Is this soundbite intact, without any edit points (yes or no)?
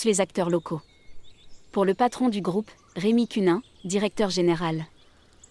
yes